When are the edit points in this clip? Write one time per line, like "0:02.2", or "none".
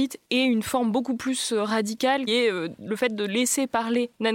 0:02.3